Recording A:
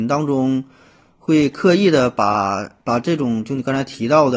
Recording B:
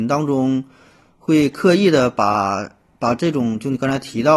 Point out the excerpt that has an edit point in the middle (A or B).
A